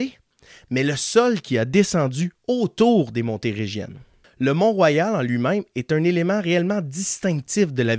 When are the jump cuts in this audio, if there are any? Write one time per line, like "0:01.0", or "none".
none

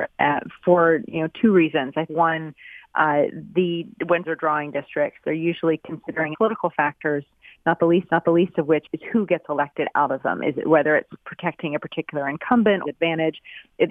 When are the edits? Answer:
0:02.1
0:04.2
0:06.3
0:08.1
0:08.8
0:12.8

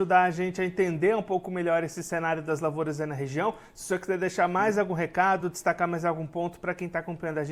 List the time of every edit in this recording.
none

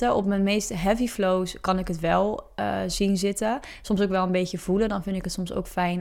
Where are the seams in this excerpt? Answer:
none

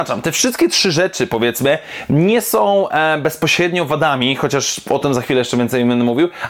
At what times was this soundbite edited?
none

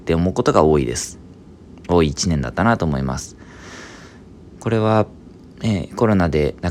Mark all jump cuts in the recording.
none

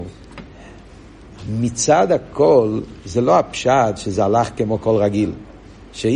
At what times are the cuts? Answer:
none

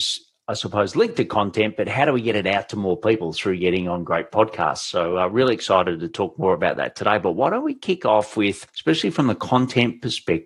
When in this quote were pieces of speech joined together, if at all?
0:08.7

